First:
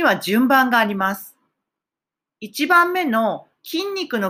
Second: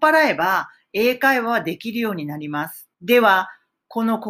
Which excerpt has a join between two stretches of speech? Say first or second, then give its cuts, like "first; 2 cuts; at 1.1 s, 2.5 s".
second; 1 cut; at 2.9 s